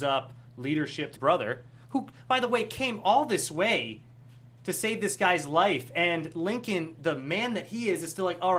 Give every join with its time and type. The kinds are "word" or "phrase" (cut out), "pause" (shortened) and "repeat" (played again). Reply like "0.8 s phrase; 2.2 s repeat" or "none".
1.2 s word